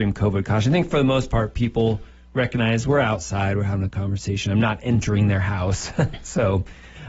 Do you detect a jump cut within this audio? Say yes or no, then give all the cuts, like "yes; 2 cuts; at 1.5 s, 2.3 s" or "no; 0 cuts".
no; 0 cuts